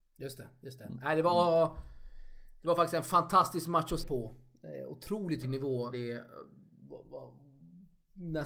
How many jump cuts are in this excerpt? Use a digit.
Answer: 3